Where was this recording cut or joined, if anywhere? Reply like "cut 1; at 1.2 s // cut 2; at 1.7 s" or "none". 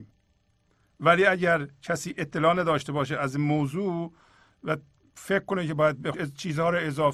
cut 1; at 6.1 s